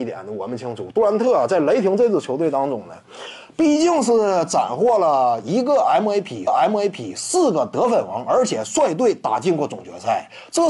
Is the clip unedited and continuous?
no; 1 cut; at 6.5 s

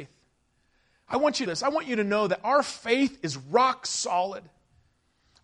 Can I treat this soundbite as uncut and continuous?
no; 1 cut; at 1.5 s

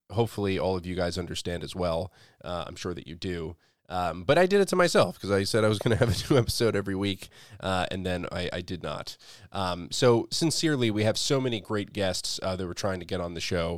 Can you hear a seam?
no; 0 cuts

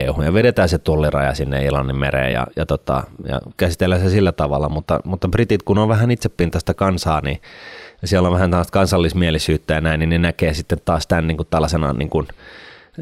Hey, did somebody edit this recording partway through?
no; 0 cuts

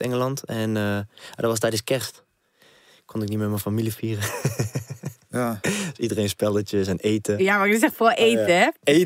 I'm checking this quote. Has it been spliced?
no; 0 cuts

